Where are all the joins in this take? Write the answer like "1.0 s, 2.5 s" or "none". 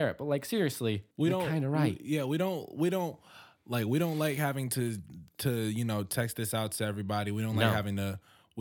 1.1 s